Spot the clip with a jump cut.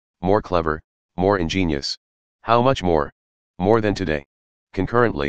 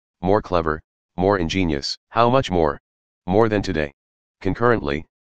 second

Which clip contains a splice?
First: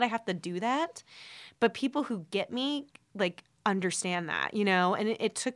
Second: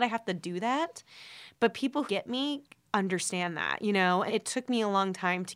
second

